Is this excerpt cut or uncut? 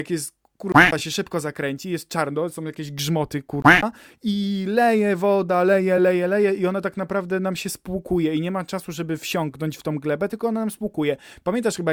uncut